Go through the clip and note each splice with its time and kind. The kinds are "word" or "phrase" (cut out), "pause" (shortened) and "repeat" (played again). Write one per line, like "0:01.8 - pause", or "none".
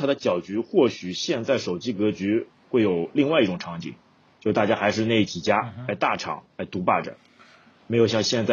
none